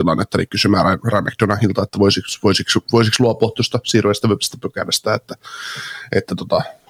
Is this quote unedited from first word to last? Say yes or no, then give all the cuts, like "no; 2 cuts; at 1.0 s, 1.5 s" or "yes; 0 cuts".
yes; 0 cuts